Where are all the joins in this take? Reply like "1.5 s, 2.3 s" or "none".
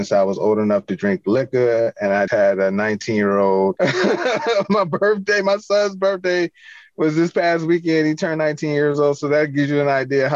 2.3 s